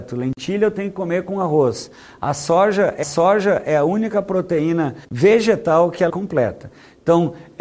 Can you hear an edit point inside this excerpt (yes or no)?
yes